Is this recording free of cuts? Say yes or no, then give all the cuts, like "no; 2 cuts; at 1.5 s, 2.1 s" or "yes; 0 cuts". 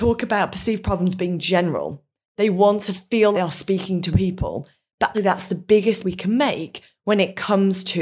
no; 4 cuts; at 3.3 s, 4.1 s, 5.1 s, 6.0 s